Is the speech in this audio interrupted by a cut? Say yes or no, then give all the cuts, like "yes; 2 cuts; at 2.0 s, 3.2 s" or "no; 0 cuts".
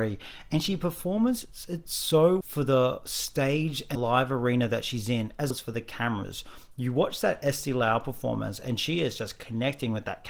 yes; 3 cuts; at 2.4 s, 4.0 s, 5.5 s